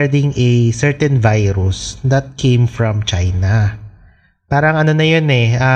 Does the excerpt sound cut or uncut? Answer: uncut